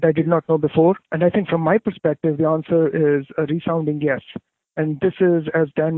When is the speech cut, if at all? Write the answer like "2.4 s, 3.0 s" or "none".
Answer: 1.0 s